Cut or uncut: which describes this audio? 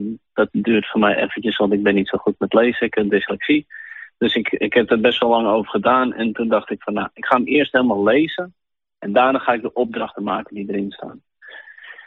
uncut